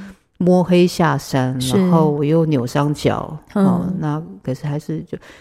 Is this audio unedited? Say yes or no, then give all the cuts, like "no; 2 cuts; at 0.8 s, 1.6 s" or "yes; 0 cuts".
yes; 0 cuts